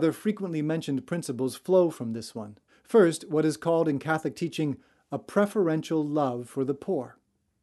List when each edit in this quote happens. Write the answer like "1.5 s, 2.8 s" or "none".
2.7 s